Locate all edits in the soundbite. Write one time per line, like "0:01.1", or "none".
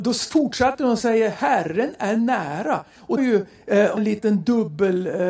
0:03.2
0:04.0